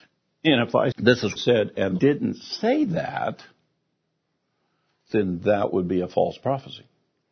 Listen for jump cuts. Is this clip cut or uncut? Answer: cut